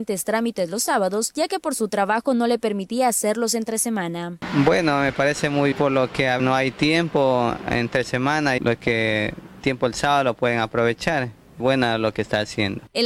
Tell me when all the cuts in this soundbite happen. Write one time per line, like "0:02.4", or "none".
0:05.7
0:06.4
0:08.6
0:09.6
0:11.6

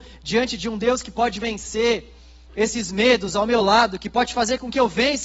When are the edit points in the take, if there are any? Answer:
none

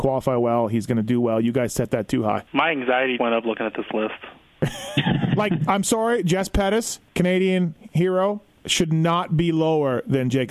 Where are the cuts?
0:02.5
0:03.2
0:07.1

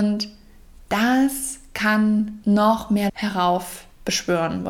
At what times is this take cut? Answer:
0:02.4
0:03.1

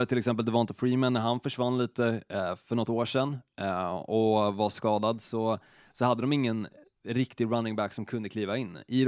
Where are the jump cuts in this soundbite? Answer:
none

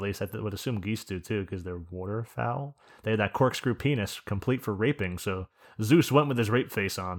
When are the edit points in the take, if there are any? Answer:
none

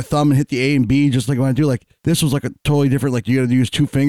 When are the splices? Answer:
0:01.3
0:02.0

